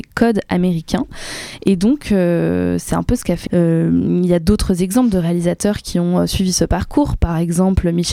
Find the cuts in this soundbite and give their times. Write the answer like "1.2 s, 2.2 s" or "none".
3.5 s